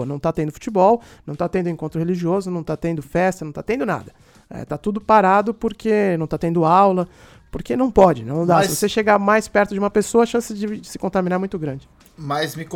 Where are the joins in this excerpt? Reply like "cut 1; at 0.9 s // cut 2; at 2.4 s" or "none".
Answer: none

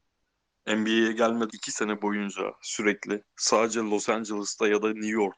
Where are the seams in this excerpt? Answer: cut 1; at 1.5 s

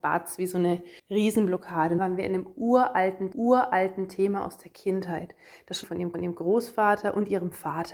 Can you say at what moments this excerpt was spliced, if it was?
cut 1; at 1.0 s // cut 2; at 2.0 s // cut 3; at 3.3 s // cut 4; at 5.8 s // cut 5; at 6.1 s

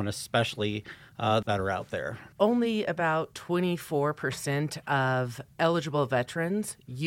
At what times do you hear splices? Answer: cut 1; at 1.4 s // cut 2; at 2.3 s // cut 3; at 5.5 s

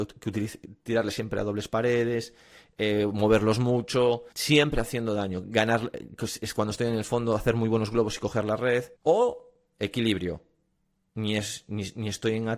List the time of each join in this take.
cut 1; at 4.3 s // cut 2; at 9.0 s

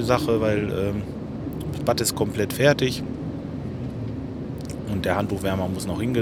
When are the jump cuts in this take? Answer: none

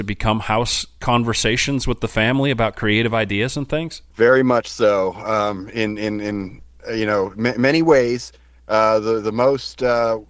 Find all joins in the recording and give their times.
none

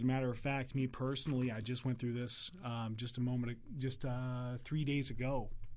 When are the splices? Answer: none

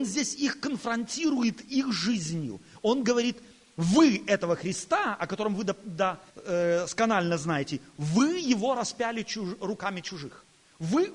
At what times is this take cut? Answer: cut 1; at 6.3 s

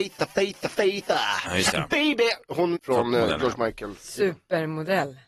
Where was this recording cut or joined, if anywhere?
cut 1; at 2.8 s

